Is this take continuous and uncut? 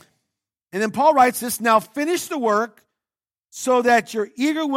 yes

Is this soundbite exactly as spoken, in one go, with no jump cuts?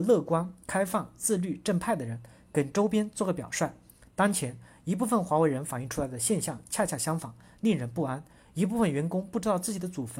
yes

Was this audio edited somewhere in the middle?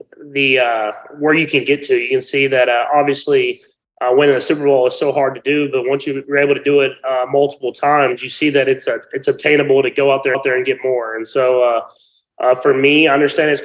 yes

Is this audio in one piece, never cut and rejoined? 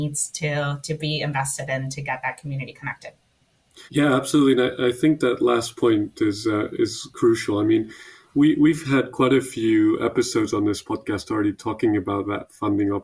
no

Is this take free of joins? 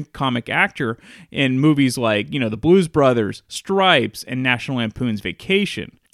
yes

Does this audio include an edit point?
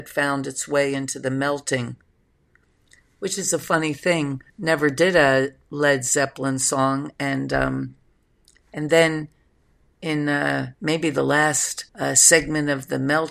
yes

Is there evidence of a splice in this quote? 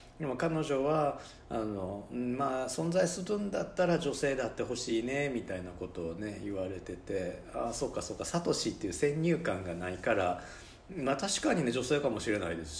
no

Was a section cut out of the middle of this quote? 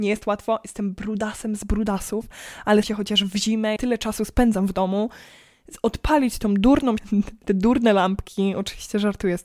yes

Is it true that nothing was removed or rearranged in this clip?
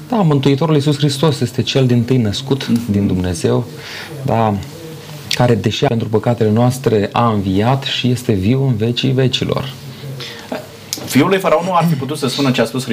no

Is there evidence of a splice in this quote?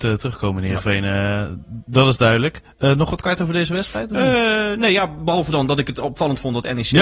no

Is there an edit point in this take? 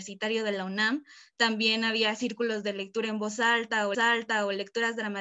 yes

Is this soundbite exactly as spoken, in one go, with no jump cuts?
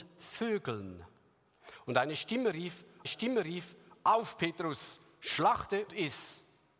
no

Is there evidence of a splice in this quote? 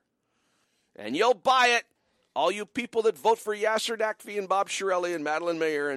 yes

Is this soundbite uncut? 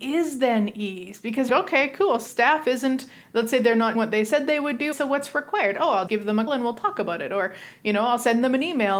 no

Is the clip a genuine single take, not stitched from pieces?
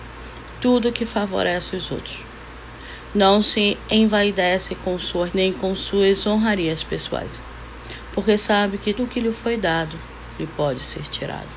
no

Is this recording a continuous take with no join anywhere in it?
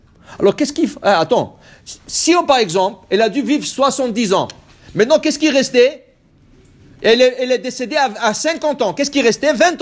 yes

